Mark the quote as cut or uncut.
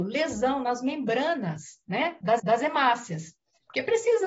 cut